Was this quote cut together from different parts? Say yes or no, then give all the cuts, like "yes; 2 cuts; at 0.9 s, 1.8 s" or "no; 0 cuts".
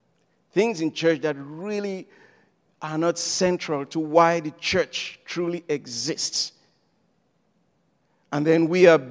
no; 0 cuts